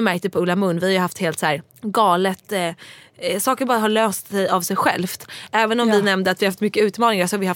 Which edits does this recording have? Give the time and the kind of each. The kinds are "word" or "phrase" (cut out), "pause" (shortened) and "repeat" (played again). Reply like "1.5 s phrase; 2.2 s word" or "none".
1.7 s pause